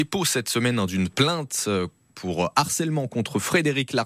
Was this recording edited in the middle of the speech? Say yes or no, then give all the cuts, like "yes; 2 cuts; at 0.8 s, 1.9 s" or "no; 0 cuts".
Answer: no; 0 cuts